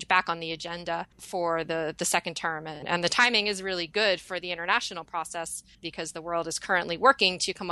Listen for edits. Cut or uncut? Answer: cut